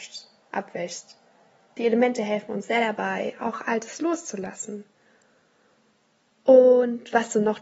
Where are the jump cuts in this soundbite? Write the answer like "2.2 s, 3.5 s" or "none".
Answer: none